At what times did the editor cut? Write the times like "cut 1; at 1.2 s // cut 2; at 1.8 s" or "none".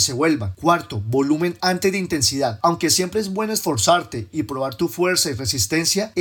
none

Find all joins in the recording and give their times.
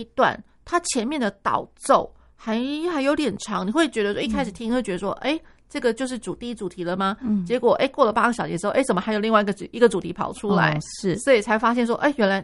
none

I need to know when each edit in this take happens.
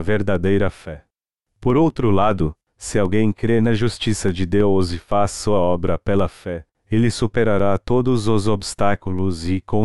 none

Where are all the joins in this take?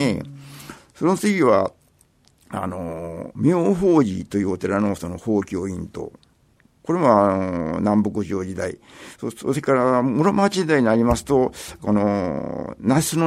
none

